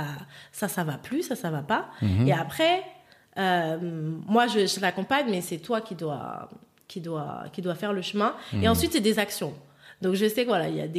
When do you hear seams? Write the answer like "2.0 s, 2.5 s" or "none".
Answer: none